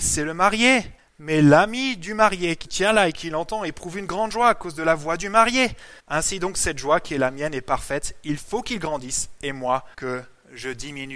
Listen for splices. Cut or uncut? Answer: cut